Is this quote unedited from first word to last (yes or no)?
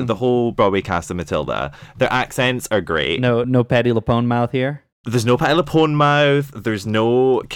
no